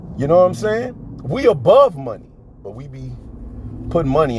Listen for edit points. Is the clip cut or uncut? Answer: uncut